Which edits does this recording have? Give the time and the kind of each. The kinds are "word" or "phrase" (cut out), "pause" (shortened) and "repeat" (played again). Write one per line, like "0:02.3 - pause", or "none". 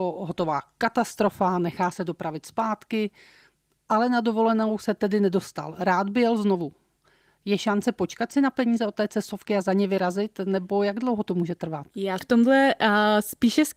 0:12.2 - word